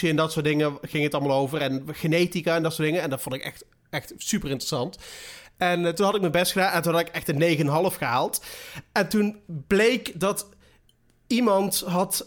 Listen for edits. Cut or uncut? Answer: uncut